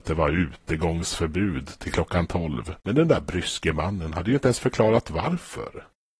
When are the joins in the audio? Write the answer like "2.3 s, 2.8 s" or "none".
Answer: 2.8 s